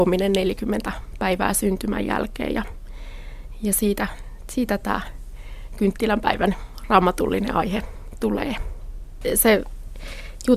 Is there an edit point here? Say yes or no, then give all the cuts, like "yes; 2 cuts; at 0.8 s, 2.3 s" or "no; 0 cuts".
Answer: no; 0 cuts